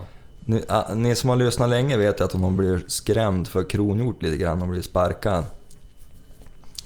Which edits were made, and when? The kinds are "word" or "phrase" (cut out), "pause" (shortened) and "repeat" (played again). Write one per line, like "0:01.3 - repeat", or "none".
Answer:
none